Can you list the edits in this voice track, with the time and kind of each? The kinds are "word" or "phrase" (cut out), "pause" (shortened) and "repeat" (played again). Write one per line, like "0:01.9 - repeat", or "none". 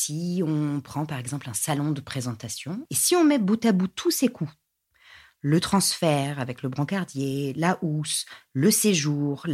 none